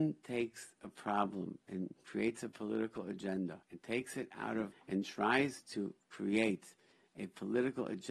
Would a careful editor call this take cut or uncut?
cut